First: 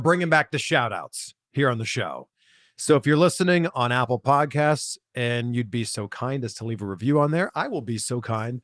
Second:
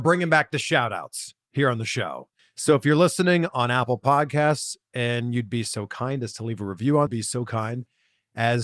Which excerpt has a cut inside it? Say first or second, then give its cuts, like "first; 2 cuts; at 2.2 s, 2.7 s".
second; 2 cuts; at 2.4 s, 7.1 s